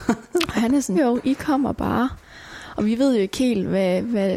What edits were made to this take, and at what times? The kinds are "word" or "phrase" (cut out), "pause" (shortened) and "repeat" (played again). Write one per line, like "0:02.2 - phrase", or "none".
0:00.9 - word

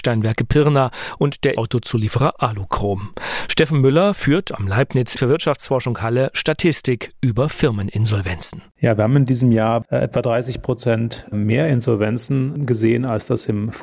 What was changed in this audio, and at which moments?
0:01.5 - word
0:05.1 - word

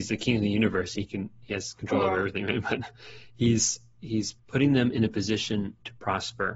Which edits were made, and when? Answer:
0:04.4 - pause

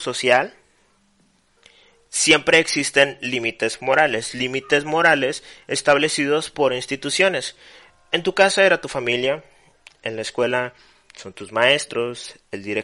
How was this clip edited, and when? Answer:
none

